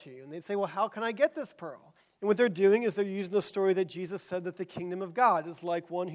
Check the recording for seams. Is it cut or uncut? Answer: cut